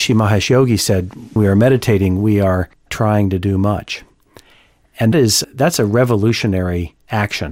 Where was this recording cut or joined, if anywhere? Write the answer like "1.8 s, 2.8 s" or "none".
1.4 s, 2.9 s, 5.1 s, 5.4 s